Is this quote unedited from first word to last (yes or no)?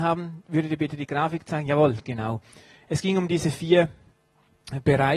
yes